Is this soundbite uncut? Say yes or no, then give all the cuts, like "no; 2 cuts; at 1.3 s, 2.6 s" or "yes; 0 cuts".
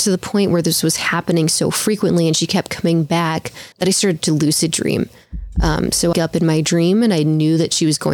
no; 2 cuts; at 3.7 s, 6.1 s